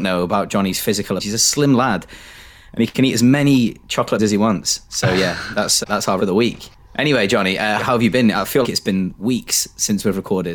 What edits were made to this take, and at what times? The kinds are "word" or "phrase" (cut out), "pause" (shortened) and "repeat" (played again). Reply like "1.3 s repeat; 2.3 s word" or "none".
1.2 s word; 4.2 s word; 5.8 s word; 6.2 s word; 7.8 s word; 8.6 s word